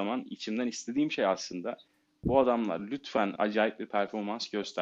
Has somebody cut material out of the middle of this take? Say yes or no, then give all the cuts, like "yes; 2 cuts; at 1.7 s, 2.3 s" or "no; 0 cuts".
no; 0 cuts